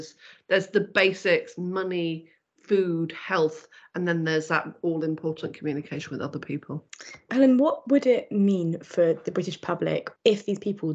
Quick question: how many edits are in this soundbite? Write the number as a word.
zero